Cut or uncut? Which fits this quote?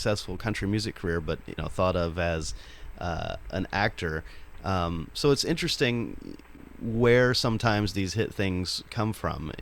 cut